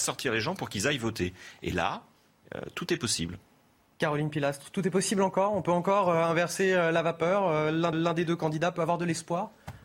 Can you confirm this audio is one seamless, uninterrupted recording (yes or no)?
no